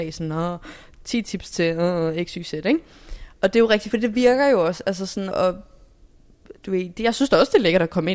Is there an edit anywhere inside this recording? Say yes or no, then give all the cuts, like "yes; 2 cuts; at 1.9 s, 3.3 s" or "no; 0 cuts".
yes; 2 cuts; at 3.9 s, 5.3 s